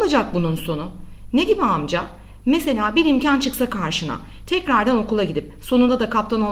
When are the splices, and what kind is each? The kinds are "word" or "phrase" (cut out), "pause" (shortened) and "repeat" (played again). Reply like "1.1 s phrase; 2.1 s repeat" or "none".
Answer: none